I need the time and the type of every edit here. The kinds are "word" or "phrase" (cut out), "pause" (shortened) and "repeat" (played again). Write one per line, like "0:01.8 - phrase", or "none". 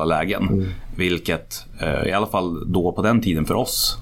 none